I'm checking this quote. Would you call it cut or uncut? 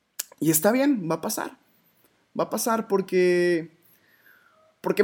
uncut